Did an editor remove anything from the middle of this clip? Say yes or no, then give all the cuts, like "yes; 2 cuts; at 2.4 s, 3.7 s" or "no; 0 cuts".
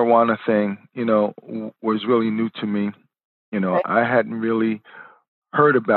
no; 0 cuts